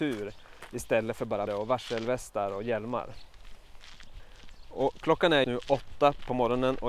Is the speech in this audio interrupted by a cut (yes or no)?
yes